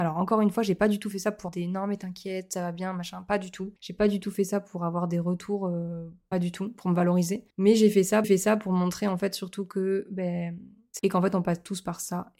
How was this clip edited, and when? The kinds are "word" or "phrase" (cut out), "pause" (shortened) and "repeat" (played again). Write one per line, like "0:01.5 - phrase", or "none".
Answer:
0:01.5 - word
0:03.8 - pause
0:07.5 - pause
0:08.2 - repeat
0:11.0 - phrase